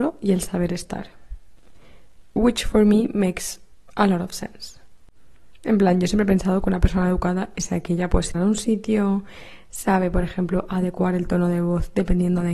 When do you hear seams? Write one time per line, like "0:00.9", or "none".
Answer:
0:08.3